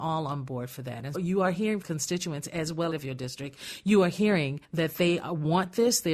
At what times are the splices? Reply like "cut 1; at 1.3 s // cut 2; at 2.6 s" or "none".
cut 1; at 1.1 s // cut 2; at 1.8 s // cut 3; at 2.9 s // cut 4; at 4.6 s